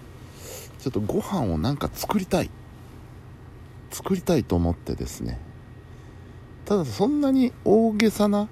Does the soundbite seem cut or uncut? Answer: cut